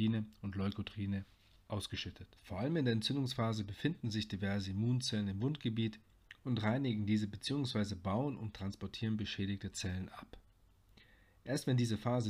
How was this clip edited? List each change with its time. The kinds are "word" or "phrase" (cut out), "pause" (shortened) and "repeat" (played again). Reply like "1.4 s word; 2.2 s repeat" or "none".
2.4 s pause